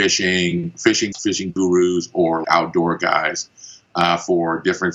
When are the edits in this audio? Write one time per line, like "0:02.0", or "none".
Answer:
0:01.1
0:02.4